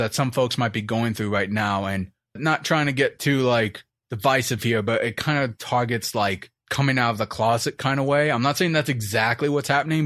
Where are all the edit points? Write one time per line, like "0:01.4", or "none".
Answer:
0:06.6